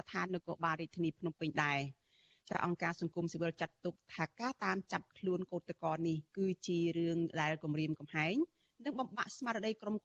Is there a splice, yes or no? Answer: yes